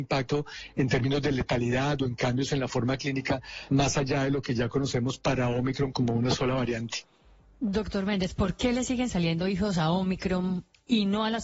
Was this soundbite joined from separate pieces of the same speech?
yes; 1 cut; at 5.9 s

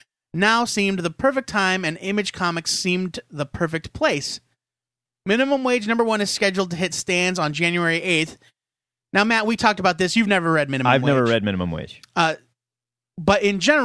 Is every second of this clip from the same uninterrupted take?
yes; 0 cuts

